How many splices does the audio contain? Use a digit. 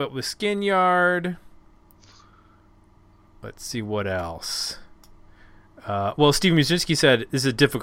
0